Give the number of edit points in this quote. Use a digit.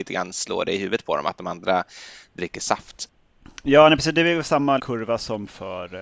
1